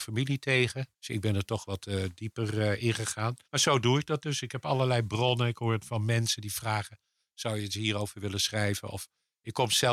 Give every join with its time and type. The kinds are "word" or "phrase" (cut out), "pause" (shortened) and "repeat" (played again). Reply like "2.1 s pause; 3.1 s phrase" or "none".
0.9 s pause; 3.4 s pause